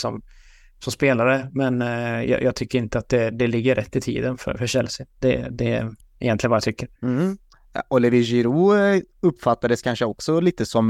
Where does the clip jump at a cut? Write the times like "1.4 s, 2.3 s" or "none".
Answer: 6.0 s, 7.0 s

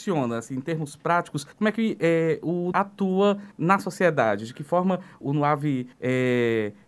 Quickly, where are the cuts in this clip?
1.5 s, 2.7 s, 3.5 s, 5.2 s, 5.9 s

